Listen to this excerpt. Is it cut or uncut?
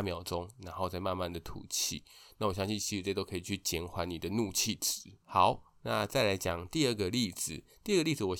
uncut